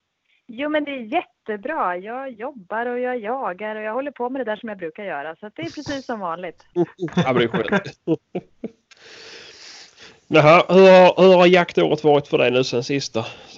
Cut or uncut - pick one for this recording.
uncut